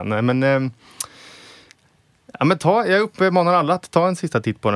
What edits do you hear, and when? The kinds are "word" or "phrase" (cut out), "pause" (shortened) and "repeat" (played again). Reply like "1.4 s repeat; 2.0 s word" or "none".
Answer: none